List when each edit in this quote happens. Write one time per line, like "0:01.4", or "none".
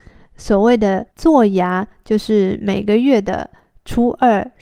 0:01.1